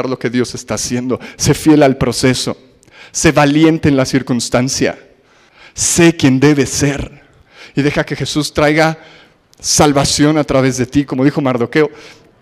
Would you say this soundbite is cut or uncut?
uncut